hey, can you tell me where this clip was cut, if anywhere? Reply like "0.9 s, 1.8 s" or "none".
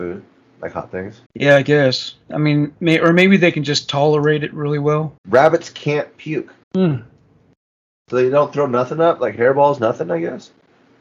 1.3 s, 5.2 s, 6.6 s